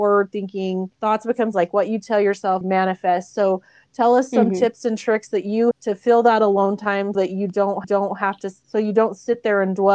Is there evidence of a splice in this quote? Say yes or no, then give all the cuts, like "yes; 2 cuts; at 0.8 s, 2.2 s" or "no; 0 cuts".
yes; 6 cuts; at 0.9 s, 1.5 s, 2.6 s, 5.7 s, 7.1 s, 7.8 s